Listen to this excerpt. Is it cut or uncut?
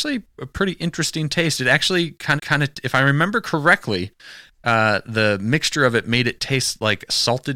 cut